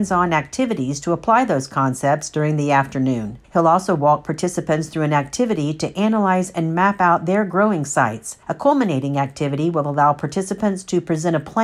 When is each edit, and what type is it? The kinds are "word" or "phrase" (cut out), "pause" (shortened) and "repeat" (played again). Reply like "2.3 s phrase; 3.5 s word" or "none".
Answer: 3.4 s pause; 8.4 s pause